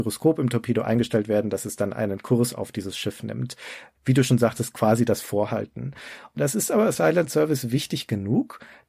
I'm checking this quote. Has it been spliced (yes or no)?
no